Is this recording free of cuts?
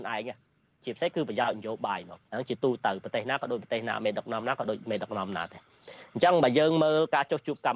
no; 1 cut; at 2.2 s

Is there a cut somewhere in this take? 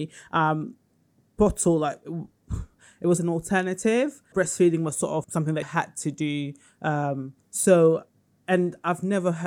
yes; 4 cuts; at 3.2 s, 4.3 s, 5.2 s, 5.6 s

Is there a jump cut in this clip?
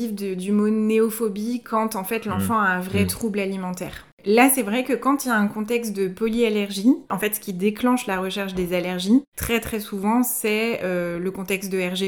no; 0 cuts

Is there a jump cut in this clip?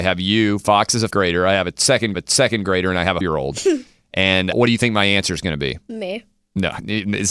yes; 4 cuts; at 1.1 s, 2.1 s, 3.2 s, 4.5 s

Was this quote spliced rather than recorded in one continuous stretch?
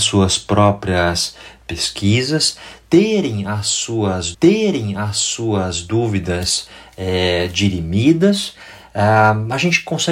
yes; 1 cut; at 4.3 s

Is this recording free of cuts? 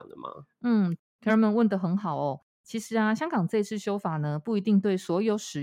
yes; 0 cuts

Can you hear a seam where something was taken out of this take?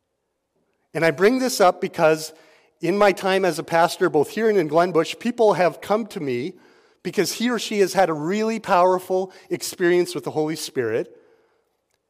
no; 0 cuts

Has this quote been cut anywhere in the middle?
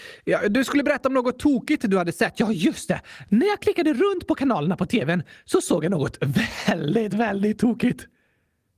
no; 0 cuts

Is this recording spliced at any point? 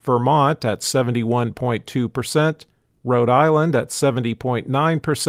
no; 0 cuts

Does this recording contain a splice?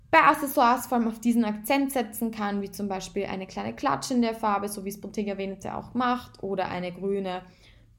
no; 0 cuts

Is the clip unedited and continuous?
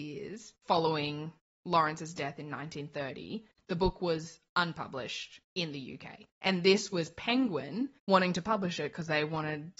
no; 3 cuts; at 5.5 s, 6.3 s, 8.0 s

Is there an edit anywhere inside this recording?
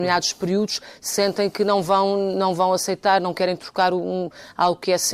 no; 0 cuts

